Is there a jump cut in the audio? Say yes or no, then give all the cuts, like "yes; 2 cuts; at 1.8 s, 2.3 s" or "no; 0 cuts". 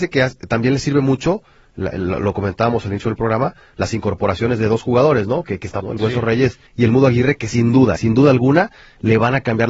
yes; 3 cuts; at 5.8 s, 6.7 s, 8.0 s